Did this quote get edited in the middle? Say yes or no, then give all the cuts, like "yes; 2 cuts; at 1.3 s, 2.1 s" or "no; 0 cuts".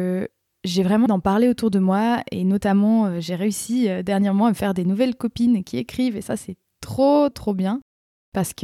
yes; 2 cuts; at 1.1 s, 7.3 s